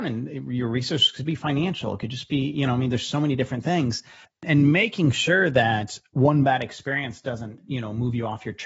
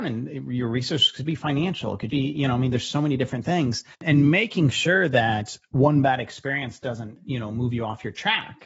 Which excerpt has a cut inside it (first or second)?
second